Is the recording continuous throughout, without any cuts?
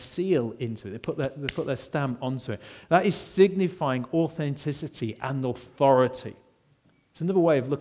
yes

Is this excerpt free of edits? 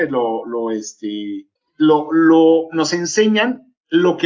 yes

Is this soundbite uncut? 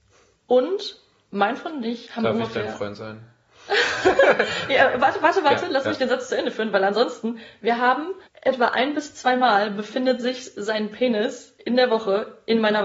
no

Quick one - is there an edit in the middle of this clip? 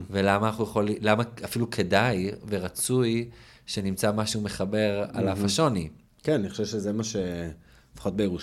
no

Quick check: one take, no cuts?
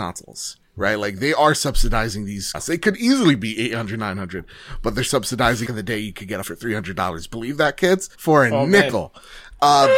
no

